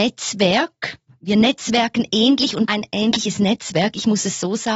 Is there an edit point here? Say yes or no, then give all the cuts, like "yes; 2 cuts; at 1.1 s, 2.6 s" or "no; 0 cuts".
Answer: yes; 1 cut; at 2.6 s